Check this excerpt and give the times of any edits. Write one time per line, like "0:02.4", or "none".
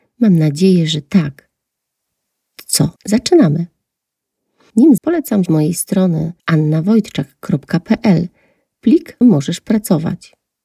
0:03.0
0:05.0
0:05.5
0:06.4
0:09.2